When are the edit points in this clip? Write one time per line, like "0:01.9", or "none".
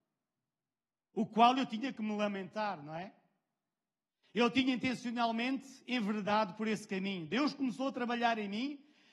none